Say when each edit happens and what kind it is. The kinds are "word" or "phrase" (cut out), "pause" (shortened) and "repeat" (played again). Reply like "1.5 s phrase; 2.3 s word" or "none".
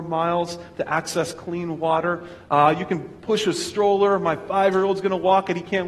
none